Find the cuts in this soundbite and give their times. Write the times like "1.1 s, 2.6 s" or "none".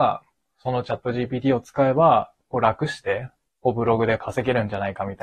3.5 s